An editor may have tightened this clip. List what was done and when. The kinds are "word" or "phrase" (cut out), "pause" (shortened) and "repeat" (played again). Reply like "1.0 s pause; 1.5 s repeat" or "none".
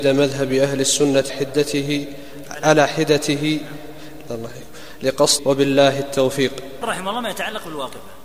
1.3 s word; 4.3 s word; 5.4 s word; 6.8 s word